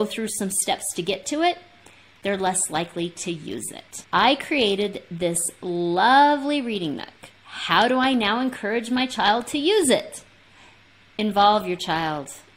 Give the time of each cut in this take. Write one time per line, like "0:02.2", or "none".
0:07.4